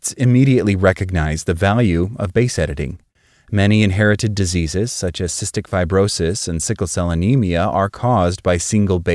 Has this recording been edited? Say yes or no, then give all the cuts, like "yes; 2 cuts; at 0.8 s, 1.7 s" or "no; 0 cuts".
no; 0 cuts